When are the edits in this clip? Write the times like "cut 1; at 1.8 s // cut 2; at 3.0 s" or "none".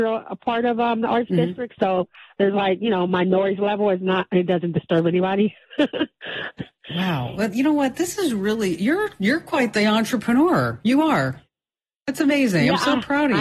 none